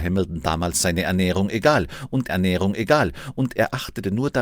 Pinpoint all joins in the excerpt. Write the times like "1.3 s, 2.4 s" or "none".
2.3 s